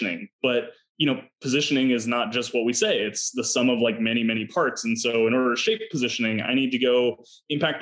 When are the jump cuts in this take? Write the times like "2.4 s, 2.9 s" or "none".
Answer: none